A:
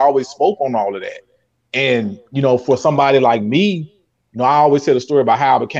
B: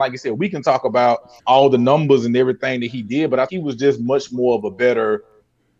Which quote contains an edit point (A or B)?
B